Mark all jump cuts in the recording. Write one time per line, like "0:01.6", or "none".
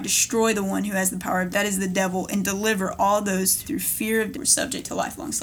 0:01.5
0:03.6
0:04.3

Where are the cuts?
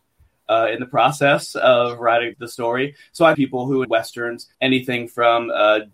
0:02.3
0:03.3
0:03.8
0:04.5

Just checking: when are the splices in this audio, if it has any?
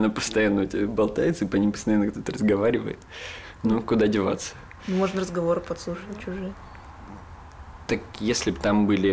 none

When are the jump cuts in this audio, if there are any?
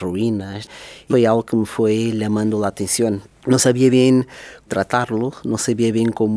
0:01.1
0:03.3
0:04.7

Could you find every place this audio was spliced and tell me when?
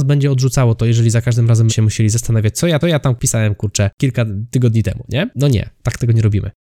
0:01.7
0:02.8

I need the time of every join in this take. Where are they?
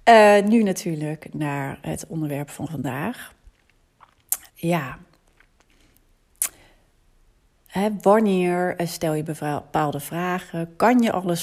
0:04.5

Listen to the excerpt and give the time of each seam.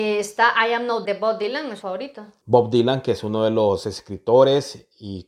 0:01.0
0:01.8

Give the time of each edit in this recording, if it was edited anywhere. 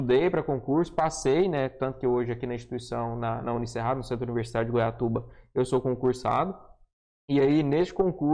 none

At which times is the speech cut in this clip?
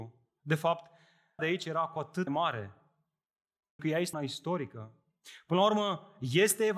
0:01.4
0:02.3
0:03.8
0:04.1

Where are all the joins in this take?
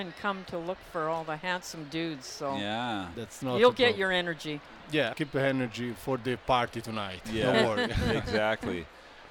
0:03.1
0:05.1

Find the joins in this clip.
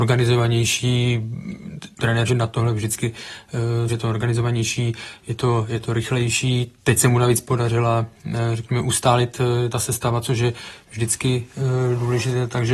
0:02.3
0:03.9

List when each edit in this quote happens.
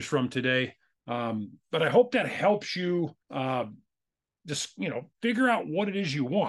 0:01.0
0:03.2
0:05.1

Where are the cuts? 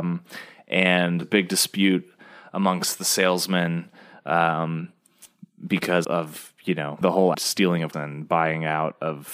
0:01.2
0:06.0
0:07.0
0:07.3
0:07.9

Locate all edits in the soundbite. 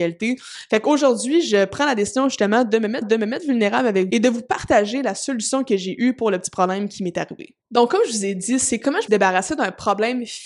0:03.0
0:04.1
0:07.6
0:09.1

